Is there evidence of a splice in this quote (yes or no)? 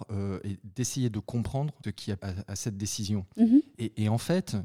yes